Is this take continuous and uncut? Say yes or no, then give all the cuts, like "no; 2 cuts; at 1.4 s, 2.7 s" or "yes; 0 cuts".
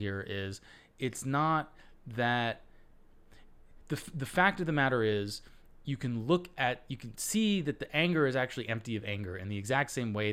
yes; 0 cuts